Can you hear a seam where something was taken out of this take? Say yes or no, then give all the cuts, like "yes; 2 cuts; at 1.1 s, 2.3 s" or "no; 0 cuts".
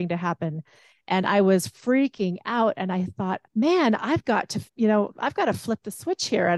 yes; 2 cuts; at 3.5 s, 4.7 s